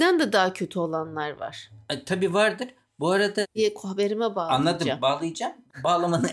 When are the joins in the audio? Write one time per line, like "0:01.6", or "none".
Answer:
none